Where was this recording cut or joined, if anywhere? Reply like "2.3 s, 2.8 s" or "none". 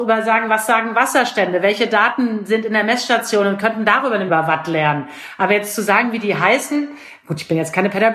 4.3 s